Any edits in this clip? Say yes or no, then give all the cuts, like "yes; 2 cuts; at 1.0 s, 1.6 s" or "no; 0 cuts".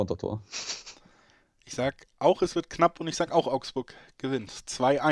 no; 0 cuts